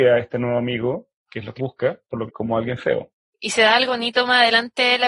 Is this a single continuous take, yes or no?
no